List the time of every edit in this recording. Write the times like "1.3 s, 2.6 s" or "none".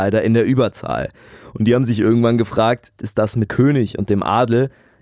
3.0 s, 3.5 s